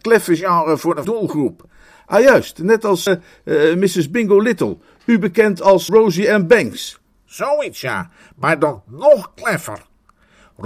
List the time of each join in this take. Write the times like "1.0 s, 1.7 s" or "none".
1.0 s, 3.1 s, 5.9 s